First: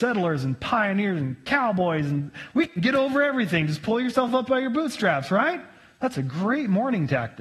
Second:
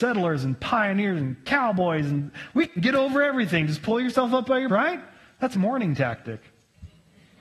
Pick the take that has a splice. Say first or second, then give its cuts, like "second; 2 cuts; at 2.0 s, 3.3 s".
second; 2 cuts; at 4.7 s, 5.5 s